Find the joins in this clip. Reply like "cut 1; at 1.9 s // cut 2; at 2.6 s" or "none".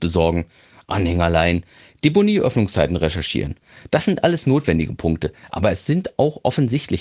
none